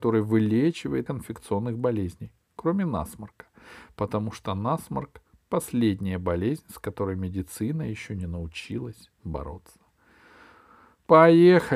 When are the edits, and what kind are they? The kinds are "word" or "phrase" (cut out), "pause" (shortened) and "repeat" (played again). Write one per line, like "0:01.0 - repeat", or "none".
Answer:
0:01.1 - phrase